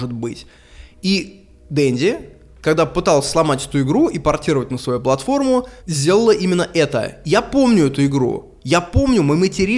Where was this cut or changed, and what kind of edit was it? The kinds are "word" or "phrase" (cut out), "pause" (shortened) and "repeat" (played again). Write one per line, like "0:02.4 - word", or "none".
0:05.8 - pause
0:08.6 - pause